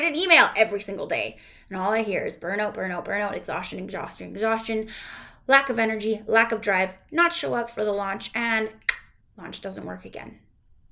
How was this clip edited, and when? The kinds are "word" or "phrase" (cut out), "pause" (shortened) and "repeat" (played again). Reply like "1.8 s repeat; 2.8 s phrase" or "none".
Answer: none